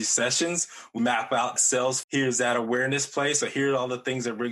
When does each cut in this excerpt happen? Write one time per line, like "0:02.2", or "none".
0:01.0
0:01.6
0:02.0